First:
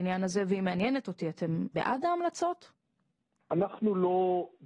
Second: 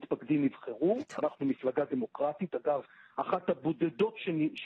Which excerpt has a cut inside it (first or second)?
first